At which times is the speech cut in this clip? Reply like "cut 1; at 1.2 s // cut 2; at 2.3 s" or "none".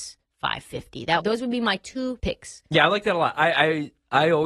cut 1; at 1.2 s // cut 2; at 2.2 s